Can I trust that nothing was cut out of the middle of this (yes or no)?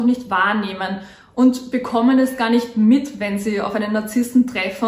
yes